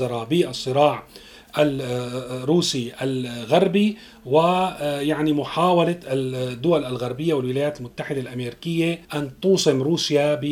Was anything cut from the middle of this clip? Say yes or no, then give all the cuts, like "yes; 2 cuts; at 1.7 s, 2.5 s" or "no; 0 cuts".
yes; 1 cut; at 9.0 s